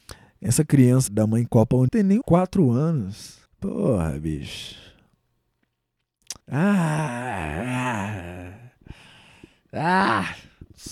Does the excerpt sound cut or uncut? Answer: cut